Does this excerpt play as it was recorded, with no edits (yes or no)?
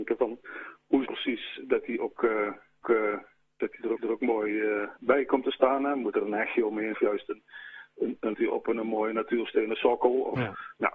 no